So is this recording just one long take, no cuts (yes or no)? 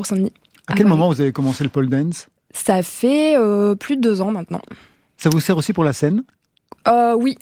yes